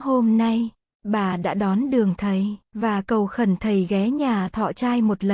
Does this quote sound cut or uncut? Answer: cut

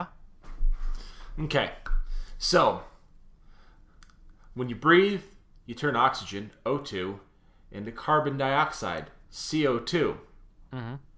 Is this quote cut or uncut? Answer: uncut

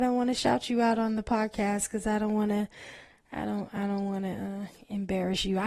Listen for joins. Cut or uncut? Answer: uncut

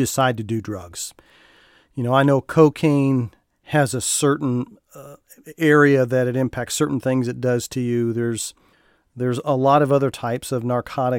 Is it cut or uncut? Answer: uncut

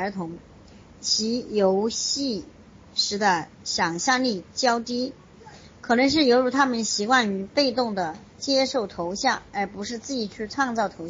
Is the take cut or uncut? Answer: cut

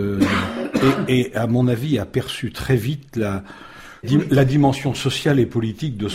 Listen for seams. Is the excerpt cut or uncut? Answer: cut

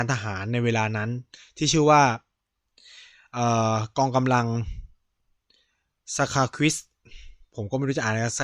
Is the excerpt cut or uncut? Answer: uncut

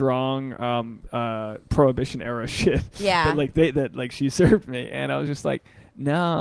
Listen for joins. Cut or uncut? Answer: uncut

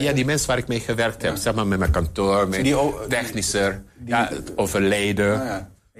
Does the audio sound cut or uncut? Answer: cut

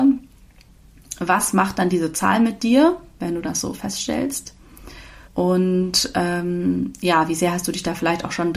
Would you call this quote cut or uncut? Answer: cut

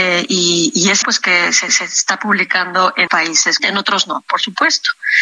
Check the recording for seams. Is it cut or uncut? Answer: cut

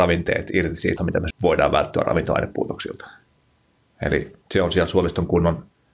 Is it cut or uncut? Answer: cut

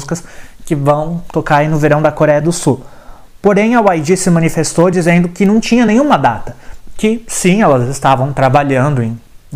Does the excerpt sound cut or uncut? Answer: uncut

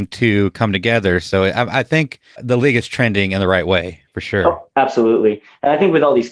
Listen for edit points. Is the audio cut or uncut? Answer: cut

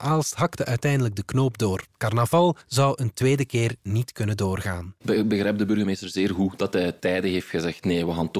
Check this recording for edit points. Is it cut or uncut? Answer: cut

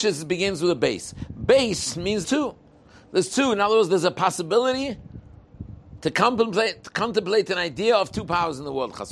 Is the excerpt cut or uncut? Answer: cut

